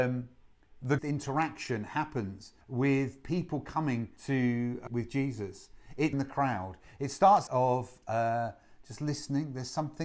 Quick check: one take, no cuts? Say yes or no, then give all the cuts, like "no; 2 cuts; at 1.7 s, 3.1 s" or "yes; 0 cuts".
no; 6 cuts; at 1.0 s, 2.6 s, 4.2 s, 4.9 s, 6.1 s, 7.5 s